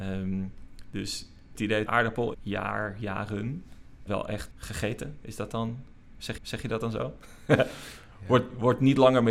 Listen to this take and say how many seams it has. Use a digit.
6